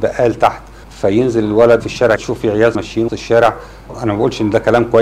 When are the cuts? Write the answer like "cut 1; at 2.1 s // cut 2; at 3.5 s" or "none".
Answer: cut 1; at 1.8 s // cut 2; at 2.2 s // cut 3; at 2.7 s // cut 4; at 3.1 s